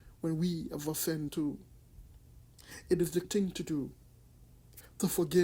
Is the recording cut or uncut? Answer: cut